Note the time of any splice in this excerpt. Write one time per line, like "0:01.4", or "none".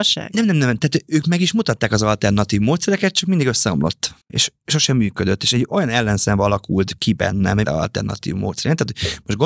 0:04.2
0:07.6

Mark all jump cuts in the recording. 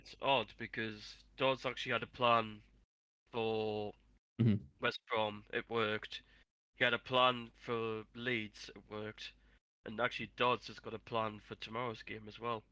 none

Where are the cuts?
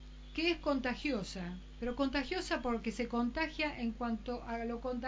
none

